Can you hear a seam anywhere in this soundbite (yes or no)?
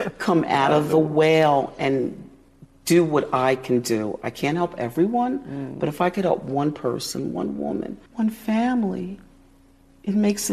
yes